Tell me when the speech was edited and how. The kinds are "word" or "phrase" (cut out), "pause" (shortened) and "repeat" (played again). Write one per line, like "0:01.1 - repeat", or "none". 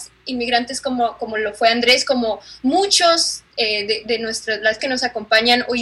0:04.8 - word